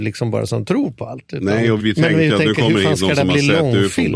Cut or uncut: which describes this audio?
cut